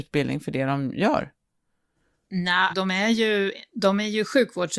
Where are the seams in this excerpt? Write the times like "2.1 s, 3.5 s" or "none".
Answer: 2.7 s